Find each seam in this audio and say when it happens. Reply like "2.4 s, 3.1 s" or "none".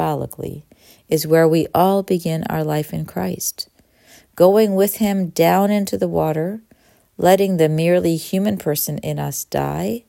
none